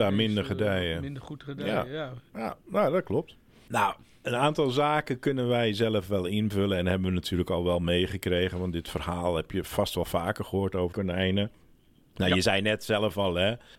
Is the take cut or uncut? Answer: cut